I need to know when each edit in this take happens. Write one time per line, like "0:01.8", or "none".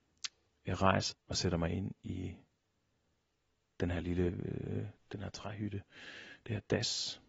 0:01.1
0:04.0
0:05.0